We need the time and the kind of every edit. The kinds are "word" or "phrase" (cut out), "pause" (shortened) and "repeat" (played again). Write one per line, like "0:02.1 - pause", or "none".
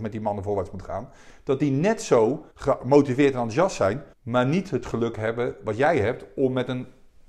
0:02.5 - pause
0:04.1 - pause

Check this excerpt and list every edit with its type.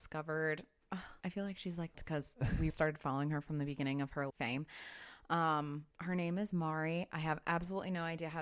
0:01.2 - pause
0:01.9 - phrase
0:02.7 - word
0:04.3 - word
0:05.9 - pause

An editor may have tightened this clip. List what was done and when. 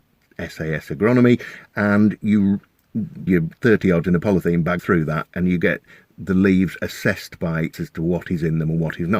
0:03.3 - word
0:04.0 - word
0:04.8 - word
0:07.7 - word

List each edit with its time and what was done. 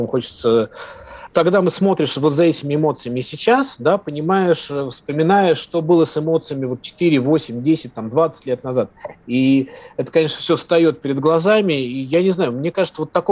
0:01.3 - word

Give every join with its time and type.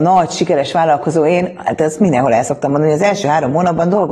none

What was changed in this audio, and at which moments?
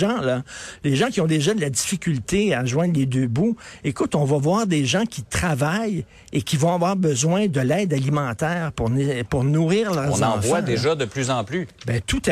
none

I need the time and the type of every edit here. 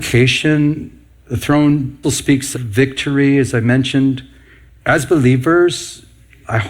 0:02.0 - word
0:02.5 - word

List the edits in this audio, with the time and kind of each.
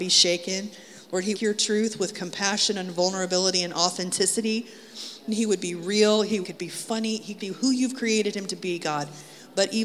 0:01.3 - phrase
0:06.4 - phrase
0:07.4 - word

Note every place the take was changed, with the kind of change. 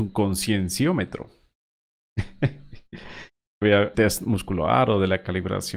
0:03.6 - word
0:03.9 - phrase

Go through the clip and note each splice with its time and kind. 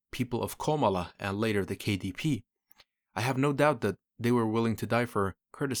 none

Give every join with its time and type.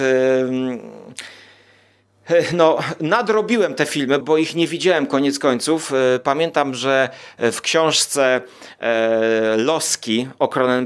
0:04.2 - phrase

